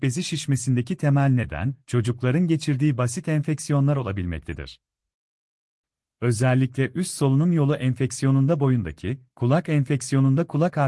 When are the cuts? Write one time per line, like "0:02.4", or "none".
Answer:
none